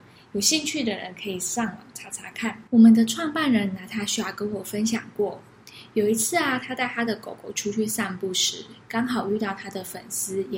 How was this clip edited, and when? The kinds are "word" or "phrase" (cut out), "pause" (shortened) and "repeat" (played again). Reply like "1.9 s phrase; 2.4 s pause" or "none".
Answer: 2.7 s pause